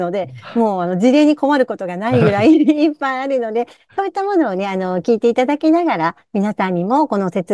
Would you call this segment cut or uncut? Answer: uncut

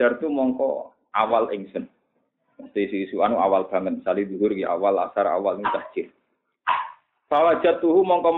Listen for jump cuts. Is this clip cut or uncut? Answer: uncut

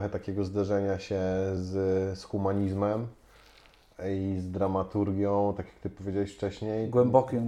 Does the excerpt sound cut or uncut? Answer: uncut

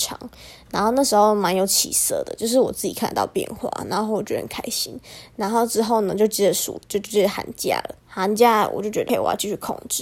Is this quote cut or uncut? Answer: cut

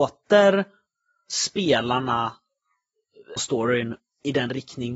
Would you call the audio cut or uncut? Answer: cut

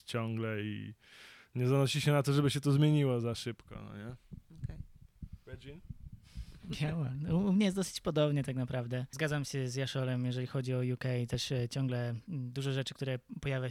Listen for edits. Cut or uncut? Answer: uncut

